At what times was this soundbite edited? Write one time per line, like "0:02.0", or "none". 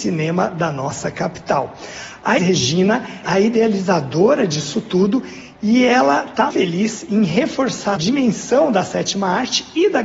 0:02.4
0:03.2
0:06.5
0:08.0